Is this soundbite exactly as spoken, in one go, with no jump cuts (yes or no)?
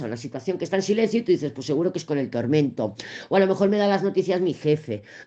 yes